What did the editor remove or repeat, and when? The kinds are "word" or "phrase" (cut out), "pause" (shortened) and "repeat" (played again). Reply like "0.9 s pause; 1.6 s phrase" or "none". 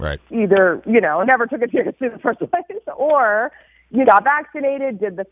1.7 s word; 4.0 s word